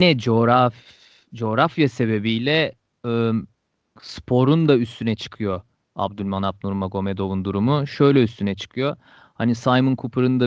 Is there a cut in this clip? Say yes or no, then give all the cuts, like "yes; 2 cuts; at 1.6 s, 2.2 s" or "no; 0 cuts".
no; 0 cuts